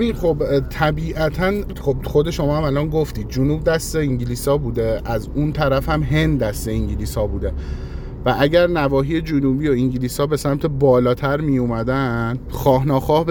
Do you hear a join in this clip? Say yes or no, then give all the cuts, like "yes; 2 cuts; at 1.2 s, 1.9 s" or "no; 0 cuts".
yes; 1 cut; at 1.7 s